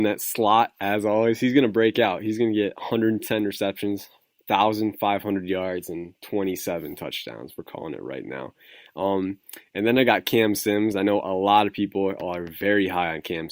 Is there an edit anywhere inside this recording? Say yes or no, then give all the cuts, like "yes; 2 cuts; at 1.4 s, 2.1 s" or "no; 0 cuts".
no; 0 cuts